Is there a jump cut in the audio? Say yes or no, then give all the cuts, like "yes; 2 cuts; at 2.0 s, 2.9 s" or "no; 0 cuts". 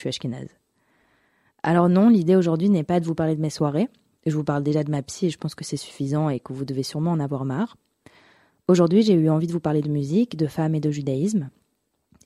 no; 0 cuts